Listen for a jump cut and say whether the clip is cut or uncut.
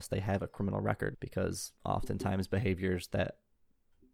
cut